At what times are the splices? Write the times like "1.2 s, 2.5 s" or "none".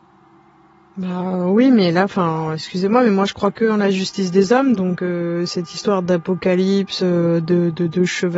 none